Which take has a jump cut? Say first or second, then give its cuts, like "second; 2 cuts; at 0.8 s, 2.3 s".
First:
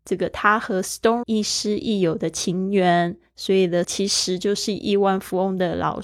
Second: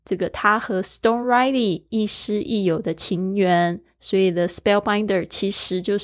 first; 2 cuts; at 1.2 s, 3.8 s